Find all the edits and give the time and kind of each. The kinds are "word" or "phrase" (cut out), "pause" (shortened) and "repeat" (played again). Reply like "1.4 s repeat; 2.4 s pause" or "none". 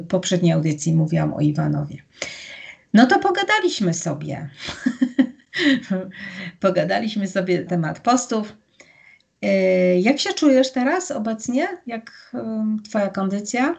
7.7 s word